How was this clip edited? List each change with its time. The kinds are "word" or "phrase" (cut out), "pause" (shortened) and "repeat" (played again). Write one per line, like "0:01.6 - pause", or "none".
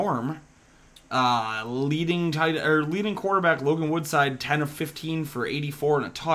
none